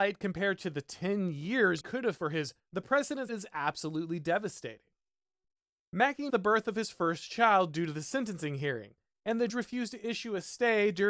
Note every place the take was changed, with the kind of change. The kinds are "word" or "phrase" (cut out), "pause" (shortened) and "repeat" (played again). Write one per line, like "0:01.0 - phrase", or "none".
0:01.8 - word
0:02.2 - word
0:02.6 - word
0:03.3 - word
0:06.3 - word
0:09.5 - word